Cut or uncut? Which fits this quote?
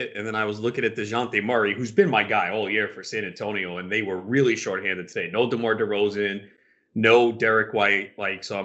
uncut